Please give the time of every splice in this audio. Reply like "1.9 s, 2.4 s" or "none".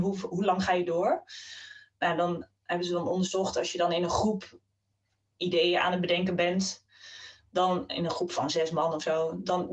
none